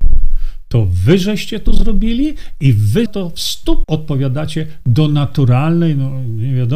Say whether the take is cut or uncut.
cut